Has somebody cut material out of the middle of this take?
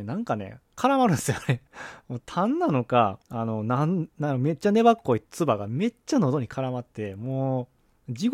yes; 2 cuts; at 1.7 s, 3.2 s

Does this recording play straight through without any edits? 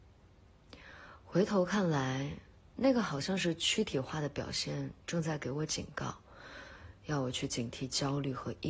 yes; 0 cuts

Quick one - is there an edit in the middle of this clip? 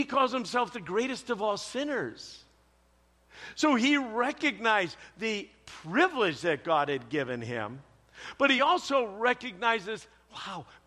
no; 0 cuts

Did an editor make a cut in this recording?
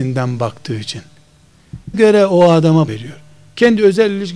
yes; 2 cuts; at 1.9 s, 2.9 s

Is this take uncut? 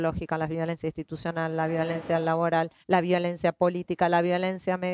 no; 1 cut; at 2.8 s

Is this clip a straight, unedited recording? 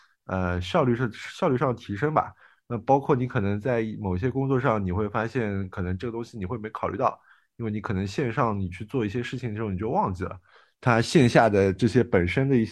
yes; 0 cuts

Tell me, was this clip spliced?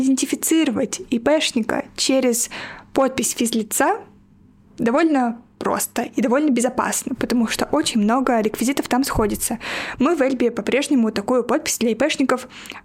no; 0 cuts

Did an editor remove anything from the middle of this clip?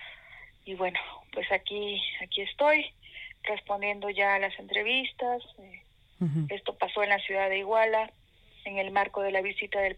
no; 0 cuts

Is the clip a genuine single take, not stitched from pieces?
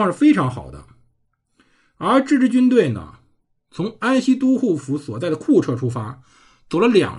yes; 0 cuts

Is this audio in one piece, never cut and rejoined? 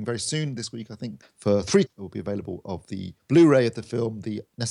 no; 1 cut; at 1.9 s

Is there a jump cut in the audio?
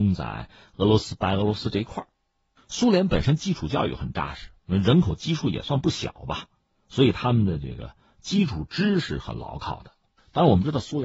no; 0 cuts

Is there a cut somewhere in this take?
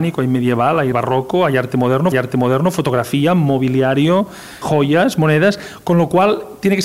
yes; 3 cuts; at 0.9 s, 2.1 s, 4.6 s

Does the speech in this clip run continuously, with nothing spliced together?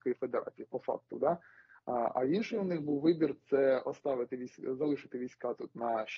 yes; 0 cuts

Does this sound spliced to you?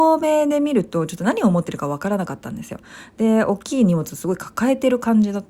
no; 0 cuts

